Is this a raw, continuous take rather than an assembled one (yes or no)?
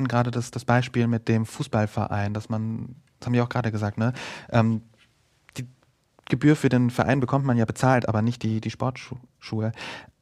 yes